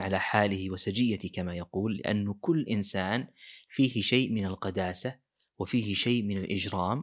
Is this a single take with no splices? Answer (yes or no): yes